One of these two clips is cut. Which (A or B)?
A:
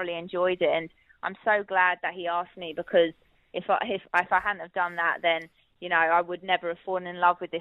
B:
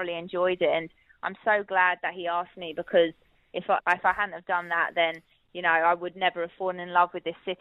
B